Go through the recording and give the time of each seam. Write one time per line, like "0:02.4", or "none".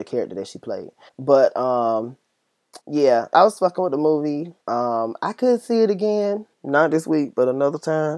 0:01.1
0:02.8
0:03.3
0:04.6
0:06.5